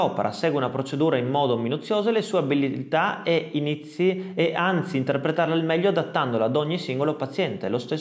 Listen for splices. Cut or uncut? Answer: uncut